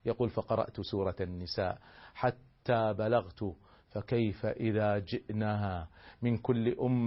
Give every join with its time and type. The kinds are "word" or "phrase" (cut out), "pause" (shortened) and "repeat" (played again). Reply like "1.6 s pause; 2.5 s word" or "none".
none

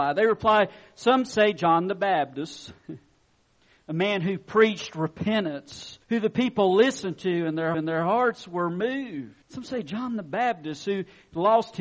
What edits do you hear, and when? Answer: 6.0 s pause; 7.7 s repeat; 9.4 s pause

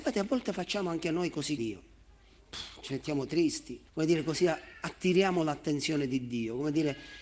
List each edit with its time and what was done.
1.6 s word; 3.9 s pause

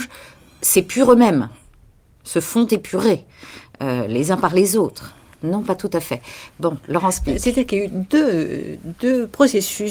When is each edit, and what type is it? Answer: none

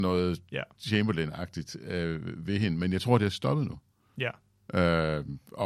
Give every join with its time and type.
none

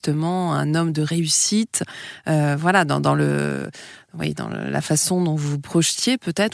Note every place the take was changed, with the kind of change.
none

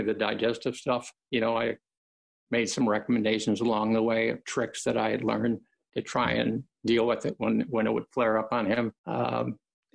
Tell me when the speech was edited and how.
none

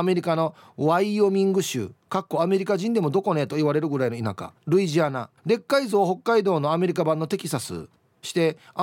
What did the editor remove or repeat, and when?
2.0 s pause; 4.6 s pause; 5.4 s pause

